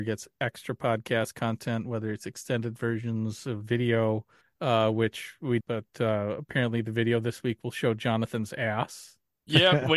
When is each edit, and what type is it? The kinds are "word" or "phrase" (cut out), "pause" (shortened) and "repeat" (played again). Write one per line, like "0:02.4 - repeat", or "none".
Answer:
0:05.6 - phrase